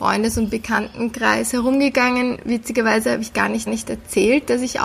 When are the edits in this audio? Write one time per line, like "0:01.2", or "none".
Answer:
0:03.7